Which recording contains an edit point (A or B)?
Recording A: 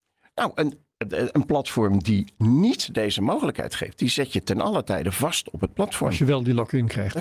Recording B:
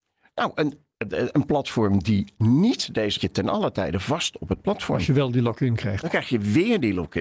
B